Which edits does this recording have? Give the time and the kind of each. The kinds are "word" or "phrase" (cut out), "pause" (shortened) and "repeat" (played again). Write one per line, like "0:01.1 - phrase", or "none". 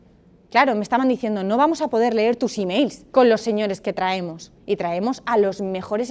0:03.1 - pause
0:04.6 - pause